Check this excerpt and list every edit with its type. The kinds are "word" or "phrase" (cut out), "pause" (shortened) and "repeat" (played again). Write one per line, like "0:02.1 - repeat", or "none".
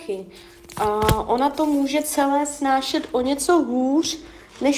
none